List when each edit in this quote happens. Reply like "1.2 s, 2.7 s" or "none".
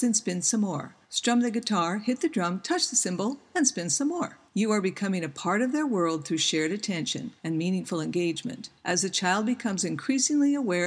1.0 s, 4.5 s, 7.4 s, 8.8 s